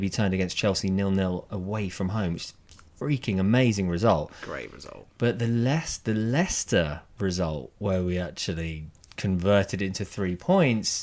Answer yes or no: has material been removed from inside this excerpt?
no